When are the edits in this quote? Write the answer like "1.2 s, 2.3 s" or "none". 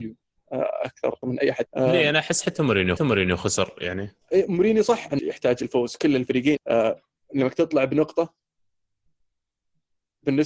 1.2 s, 1.7 s, 3.0 s, 4.2 s, 5.2 s, 6.6 s